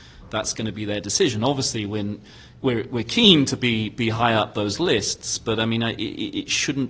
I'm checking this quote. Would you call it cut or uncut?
uncut